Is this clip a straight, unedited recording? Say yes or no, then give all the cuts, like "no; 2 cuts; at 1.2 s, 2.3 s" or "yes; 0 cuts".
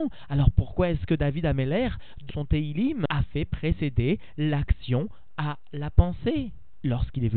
no; 1 cut; at 2.3 s